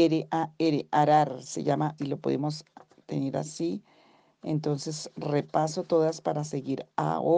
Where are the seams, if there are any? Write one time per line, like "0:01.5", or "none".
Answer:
0:02.0